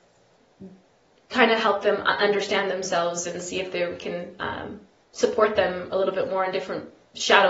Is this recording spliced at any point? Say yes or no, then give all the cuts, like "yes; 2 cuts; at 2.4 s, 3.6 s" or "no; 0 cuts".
no; 0 cuts